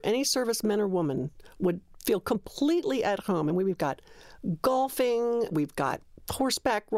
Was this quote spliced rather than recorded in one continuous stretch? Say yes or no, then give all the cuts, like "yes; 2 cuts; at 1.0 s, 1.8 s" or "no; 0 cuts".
no; 0 cuts